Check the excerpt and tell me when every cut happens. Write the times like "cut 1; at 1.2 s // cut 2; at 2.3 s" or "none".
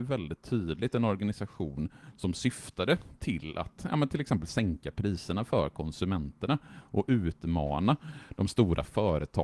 none